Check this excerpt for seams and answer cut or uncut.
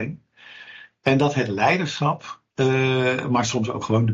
cut